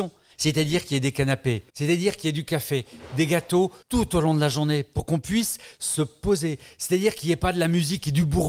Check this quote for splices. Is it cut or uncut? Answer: cut